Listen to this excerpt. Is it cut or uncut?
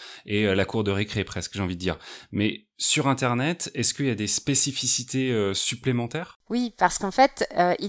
uncut